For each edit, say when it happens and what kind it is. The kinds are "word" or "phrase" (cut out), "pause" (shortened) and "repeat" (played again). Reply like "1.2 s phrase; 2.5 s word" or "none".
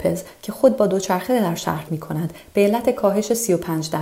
1.9 s word